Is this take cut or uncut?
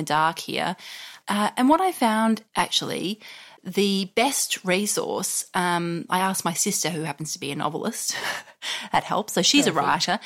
cut